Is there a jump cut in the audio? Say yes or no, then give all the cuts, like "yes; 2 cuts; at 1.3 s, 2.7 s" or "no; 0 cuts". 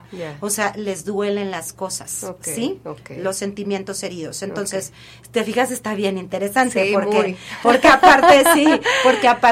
no; 0 cuts